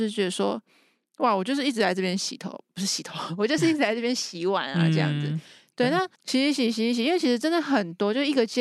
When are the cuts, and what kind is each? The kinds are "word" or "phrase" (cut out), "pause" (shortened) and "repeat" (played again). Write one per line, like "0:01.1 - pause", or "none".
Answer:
0:06.1 - pause